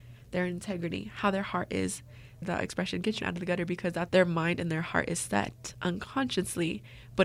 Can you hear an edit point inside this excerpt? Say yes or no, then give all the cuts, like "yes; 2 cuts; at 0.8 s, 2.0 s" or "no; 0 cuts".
yes; 2 cuts; at 3.2 s, 4.1 s